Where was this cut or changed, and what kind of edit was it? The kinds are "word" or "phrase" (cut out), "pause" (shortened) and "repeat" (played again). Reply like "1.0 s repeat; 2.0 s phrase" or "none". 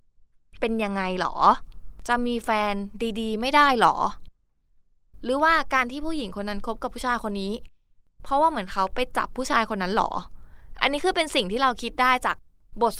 none